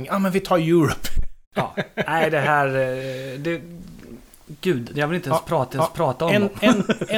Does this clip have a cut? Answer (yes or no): yes